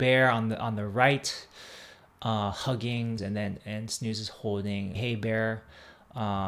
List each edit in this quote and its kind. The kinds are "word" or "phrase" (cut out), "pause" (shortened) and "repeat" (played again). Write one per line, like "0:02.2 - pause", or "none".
0:03.2 - word
0:04.9 - word